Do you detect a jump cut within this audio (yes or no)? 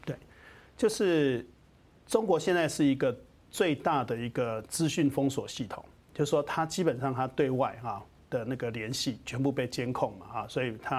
no